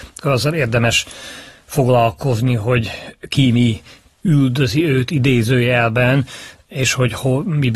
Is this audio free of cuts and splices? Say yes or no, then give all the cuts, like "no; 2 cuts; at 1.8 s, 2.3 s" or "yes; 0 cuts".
yes; 0 cuts